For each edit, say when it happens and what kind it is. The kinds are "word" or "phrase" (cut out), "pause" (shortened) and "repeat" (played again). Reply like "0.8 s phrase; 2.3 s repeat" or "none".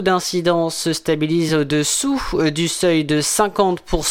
none